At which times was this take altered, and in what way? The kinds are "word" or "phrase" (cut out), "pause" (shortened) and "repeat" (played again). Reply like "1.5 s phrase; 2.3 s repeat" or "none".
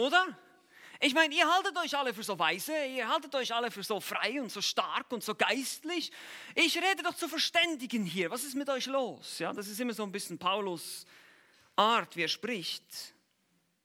none